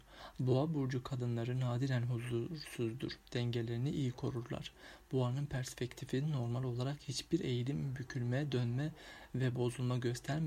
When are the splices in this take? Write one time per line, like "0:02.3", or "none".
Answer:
none